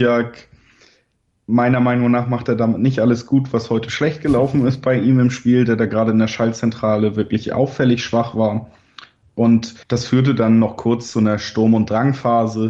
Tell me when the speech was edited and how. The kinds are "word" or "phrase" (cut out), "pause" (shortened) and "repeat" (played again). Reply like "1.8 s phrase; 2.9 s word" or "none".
9.8 s pause